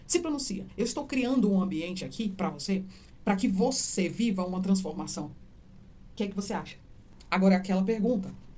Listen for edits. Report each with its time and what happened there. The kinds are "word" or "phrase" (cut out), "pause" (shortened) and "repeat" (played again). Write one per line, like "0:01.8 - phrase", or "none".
none